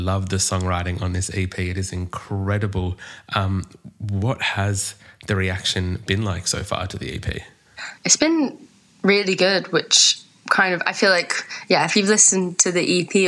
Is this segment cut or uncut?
cut